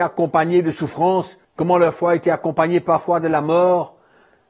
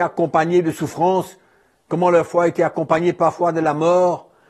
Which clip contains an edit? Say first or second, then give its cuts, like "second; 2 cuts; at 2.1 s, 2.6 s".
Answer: first; 1 cut; at 1.4 s